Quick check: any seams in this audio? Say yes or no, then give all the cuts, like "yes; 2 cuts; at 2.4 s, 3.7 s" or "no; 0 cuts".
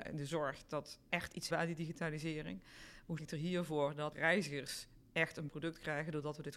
yes; 5 cuts; at 1.1 s, 1.5 s, 3.2 s, 4.1 s, 5.5 s